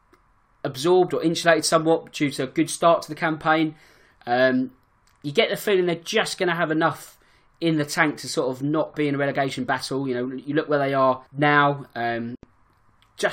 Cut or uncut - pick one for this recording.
cut